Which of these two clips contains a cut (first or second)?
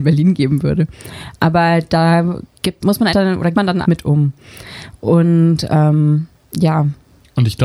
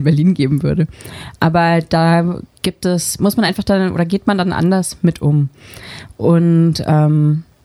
first